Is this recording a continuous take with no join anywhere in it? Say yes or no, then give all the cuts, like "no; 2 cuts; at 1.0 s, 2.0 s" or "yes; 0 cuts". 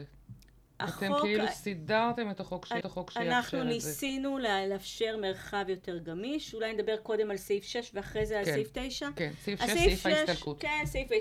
no; 1 cut; at 2.8 s